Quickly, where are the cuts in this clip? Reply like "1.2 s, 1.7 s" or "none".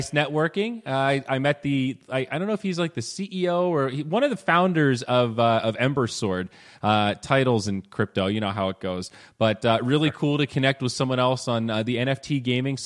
none